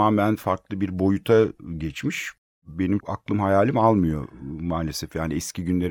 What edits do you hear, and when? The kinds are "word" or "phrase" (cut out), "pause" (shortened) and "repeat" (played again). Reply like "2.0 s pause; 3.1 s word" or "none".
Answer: 3.0 s word